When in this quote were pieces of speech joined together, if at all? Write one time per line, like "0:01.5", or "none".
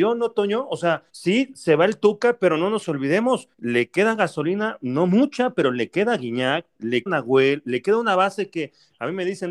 0:01.1
0:03.5
0:07.1